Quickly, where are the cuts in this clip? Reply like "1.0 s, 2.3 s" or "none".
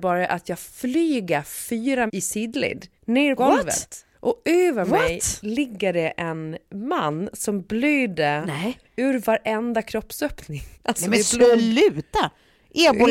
2.1 s, 3.0 s, 3.4 s, 4.1 s, 10.7 s